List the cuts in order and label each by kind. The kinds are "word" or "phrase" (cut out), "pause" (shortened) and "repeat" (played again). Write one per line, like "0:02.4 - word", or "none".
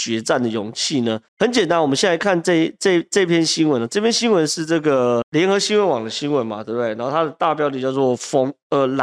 0:01.3 - pause